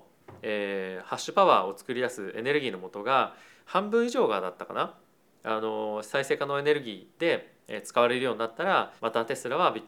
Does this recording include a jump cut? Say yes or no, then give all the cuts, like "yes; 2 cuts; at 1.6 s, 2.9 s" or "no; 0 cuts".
yes; 1 cut; at 9.0 s